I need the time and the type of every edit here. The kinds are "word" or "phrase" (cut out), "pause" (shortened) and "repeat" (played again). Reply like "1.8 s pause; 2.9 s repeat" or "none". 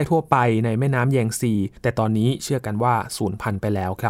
1.8 s pause